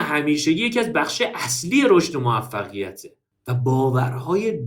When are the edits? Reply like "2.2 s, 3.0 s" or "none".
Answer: none